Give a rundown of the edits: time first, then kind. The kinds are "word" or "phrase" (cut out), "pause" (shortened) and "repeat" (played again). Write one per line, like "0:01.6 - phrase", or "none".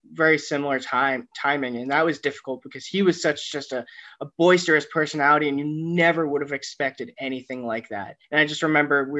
0:08.2 - pause